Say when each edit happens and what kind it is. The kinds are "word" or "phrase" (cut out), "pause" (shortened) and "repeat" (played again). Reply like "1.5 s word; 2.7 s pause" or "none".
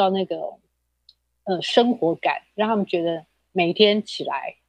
none